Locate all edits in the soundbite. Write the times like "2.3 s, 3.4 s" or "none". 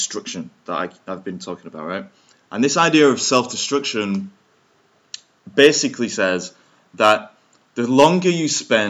none